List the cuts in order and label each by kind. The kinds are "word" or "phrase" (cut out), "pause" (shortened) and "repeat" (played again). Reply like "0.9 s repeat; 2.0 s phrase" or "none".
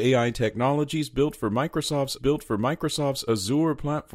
2.2 s repeat